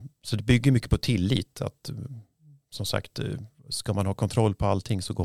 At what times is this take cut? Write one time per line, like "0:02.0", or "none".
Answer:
none